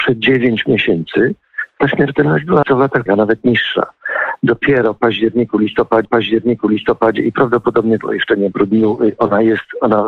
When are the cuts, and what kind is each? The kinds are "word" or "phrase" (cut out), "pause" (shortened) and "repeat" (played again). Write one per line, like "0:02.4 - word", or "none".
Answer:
0:02.6 - phrase
0:03.1 - word
0:06.0 - repeat
0:08.0 - phrase
0:08.5 - phrase